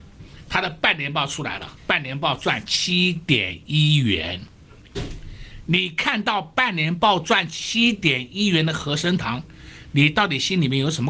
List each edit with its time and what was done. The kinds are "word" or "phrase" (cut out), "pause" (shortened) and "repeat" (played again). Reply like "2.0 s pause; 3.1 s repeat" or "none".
1.8 s pause